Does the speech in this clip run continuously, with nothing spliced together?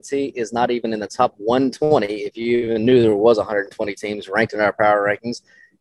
yes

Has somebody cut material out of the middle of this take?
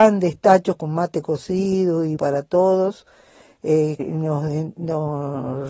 yes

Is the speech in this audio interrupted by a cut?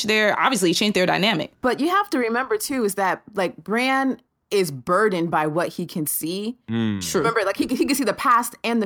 no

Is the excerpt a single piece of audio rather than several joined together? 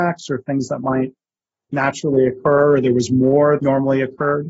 no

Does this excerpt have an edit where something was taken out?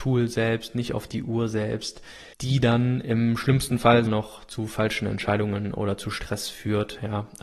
yes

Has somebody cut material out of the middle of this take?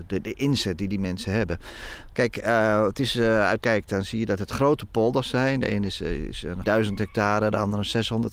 yes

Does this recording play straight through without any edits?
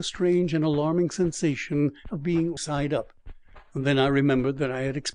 no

